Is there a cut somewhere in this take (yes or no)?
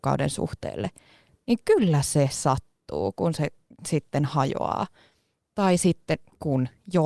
no